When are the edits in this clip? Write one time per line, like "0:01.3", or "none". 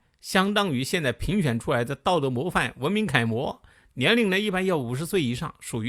none